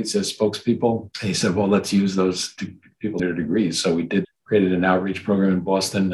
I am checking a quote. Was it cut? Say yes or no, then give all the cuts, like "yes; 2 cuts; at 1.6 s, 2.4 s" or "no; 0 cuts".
yes; 3 cuts; at 1.1 s, 3.2 s, 4.2 s